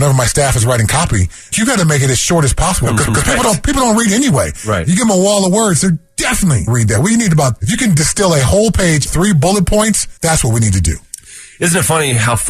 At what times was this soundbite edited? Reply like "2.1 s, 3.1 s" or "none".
1.5 s, 3.1 s, 6.7 s, 7.6 s, 9.1 s, 10.2 s